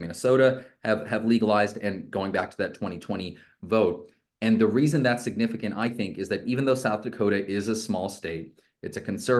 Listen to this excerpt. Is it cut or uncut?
uncut